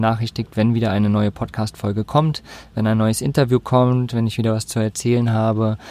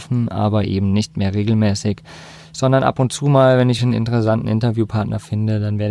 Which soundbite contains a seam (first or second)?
second